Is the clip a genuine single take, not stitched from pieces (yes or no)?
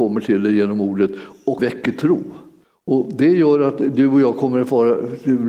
no